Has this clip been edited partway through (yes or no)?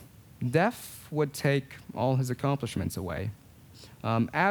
no